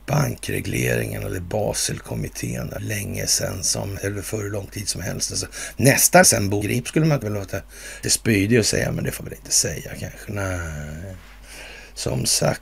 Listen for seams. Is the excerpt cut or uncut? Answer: cut